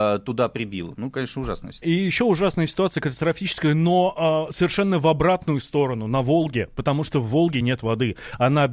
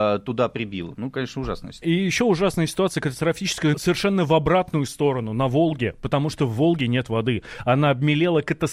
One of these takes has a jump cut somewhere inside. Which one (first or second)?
second